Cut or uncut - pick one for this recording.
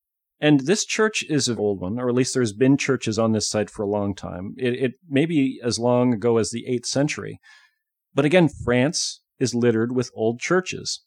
cut